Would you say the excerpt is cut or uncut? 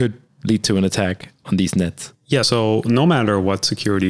cut